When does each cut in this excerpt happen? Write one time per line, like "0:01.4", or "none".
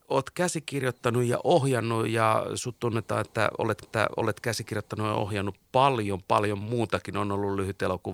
0:03.8